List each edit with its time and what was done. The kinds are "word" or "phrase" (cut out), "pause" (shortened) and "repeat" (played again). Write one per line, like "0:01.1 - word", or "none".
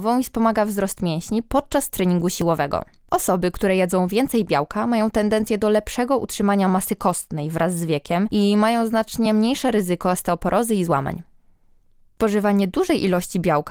none